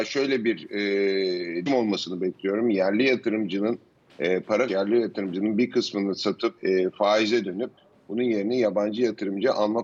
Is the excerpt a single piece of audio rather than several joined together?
no; 3 cuts; at 1.7 s, 4.7 s, 6.6 s

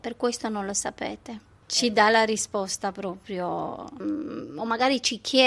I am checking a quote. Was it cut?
no; 0 cuts

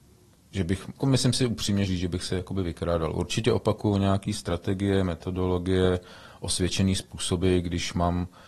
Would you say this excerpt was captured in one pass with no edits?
no; 2 cuts; at 1.0 s, 1.9 s

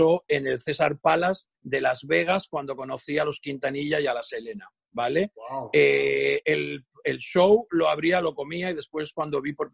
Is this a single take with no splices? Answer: no; 1 cut; at 1.5 s

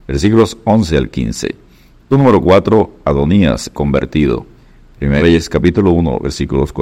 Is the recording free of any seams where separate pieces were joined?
no; 3 cuts; at 2.1 s, 3.7 s, 5.2 s

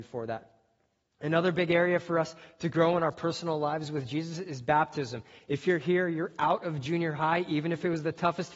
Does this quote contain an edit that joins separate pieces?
no; 0 cuts

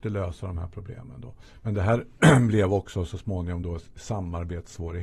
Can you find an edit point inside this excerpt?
no; 0 cuts

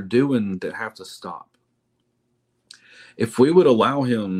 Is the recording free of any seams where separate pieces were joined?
yes; 0 cuts

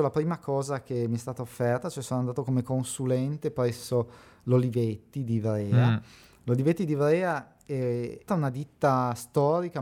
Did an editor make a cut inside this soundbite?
yes; 1 cut; at 8.3 s

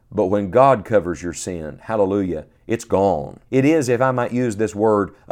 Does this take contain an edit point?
yes; 2 cuts; at 2.5 s, 3.5 s

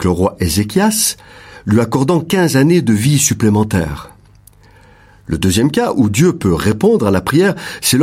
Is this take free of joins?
yes; 0 cuts

